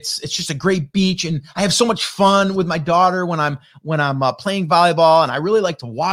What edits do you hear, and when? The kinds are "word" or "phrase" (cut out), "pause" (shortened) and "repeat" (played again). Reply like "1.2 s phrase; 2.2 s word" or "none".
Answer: none

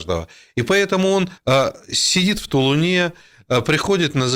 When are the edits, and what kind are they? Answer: 1.4 s pause

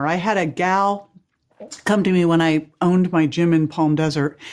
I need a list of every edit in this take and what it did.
none

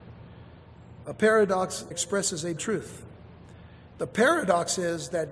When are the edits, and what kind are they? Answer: 1.9 s word; 2.6 s word

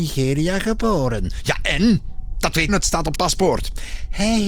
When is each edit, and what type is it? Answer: 2.7 s word; 3.2 s word

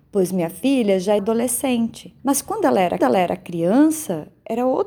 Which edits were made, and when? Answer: 1.2 s word; 2.2 s pause; 3.0 s repeat

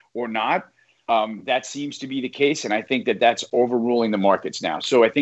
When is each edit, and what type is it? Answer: none

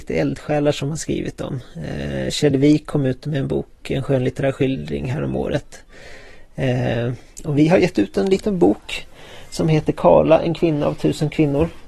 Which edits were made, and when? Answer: none

